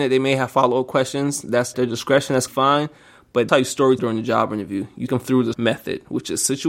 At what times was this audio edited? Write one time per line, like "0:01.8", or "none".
0:01.7
0:02.5
0:03.5
0:04.0
0:05.1
0:05.5